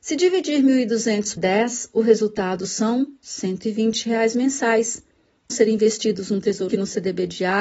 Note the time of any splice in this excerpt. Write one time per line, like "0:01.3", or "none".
0:01.4
0:05.5
0:06.7